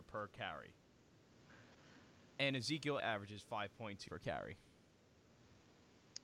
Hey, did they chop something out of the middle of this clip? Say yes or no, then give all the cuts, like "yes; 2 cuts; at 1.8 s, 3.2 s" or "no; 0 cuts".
yes; 2 cuts; at 3.0 s, 4.1 s